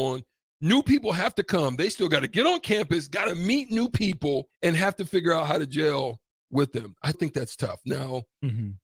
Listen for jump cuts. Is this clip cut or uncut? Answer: cut